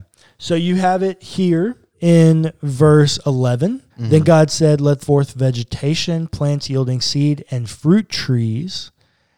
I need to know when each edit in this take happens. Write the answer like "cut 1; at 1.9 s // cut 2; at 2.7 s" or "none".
cut 1; at 1.9 s // cut 2; at 3.9 s // cut 3; at 5.0 s